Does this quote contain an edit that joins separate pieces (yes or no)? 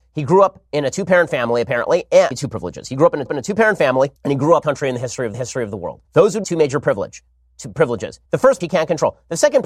yes